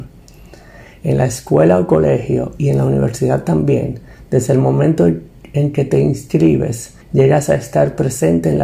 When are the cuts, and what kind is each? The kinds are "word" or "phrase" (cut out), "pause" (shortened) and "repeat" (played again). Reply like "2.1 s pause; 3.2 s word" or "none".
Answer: 7.0 s pause